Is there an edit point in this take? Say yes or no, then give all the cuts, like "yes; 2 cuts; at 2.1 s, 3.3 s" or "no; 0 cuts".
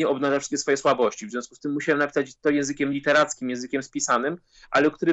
no; 0 cuts